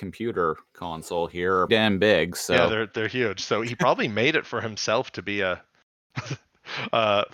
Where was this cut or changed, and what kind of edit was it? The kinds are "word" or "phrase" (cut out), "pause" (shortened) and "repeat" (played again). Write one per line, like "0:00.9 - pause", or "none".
0:01.7 - word